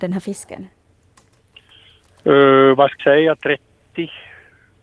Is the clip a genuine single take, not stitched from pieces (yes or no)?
no